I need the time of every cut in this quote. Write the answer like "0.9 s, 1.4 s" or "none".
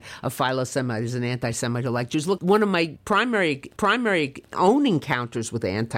2.4 s, 3.8 s